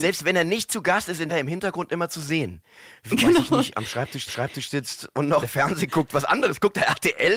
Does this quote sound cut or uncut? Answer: cut